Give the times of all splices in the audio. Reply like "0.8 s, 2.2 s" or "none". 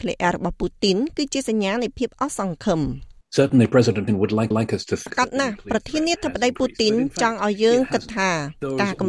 3.2 s, 4.1 s, 4.5 s, 5.1 s